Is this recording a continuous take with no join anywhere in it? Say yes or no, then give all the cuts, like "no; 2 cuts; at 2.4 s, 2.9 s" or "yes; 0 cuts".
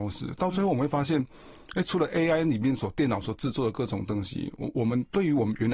yes; 0 cuts